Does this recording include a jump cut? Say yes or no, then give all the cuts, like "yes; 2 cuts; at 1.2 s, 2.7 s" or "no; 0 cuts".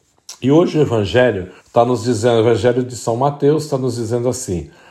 yes; 1 cut; at 1.6 s